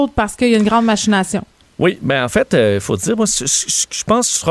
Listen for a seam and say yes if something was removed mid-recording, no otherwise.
no